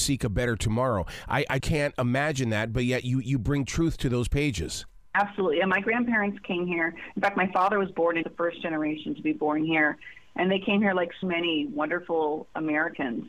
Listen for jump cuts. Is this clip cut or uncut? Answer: cut